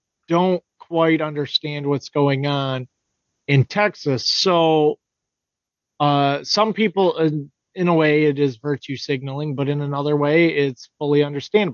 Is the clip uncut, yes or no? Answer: yes